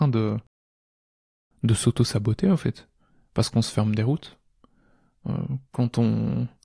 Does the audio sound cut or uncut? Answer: uncut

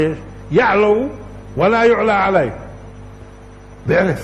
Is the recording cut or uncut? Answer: uncut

